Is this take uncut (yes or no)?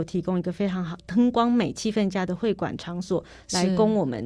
yes